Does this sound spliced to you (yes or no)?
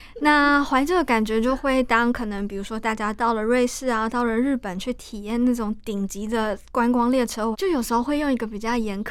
yes